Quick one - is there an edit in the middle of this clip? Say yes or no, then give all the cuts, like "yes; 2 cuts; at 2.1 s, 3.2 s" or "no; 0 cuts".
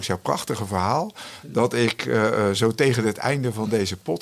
no; 0 cuts